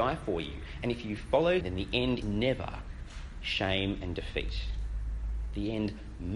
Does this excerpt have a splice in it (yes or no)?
yes